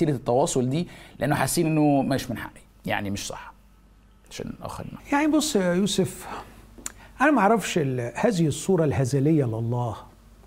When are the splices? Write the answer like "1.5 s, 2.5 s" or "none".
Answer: 5.0 s